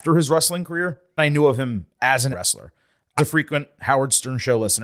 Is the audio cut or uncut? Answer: cut